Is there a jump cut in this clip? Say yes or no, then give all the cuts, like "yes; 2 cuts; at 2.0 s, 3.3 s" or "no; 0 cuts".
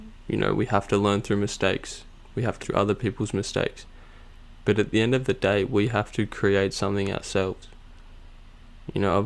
yes; 1 cut; at 2.6 s